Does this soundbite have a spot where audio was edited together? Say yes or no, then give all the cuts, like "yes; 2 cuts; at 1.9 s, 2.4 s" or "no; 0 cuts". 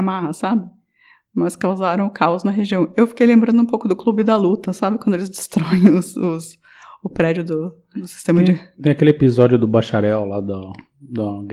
no; 0 cuts